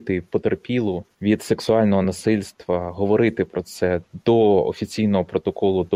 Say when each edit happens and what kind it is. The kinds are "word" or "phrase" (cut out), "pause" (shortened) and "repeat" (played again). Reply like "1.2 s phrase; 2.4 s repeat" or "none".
none